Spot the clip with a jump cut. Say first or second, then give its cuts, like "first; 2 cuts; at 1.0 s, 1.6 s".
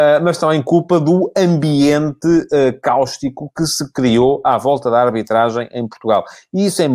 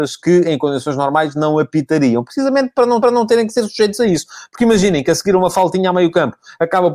second; 1 cut; at 3.0 s